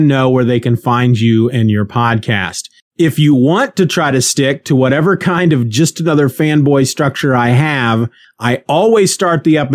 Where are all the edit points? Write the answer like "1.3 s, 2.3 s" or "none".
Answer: none